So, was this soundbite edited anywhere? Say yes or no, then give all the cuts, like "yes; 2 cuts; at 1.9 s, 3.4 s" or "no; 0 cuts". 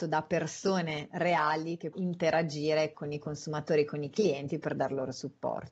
yes; 2 cuts; at 1.9 s, 2.9 s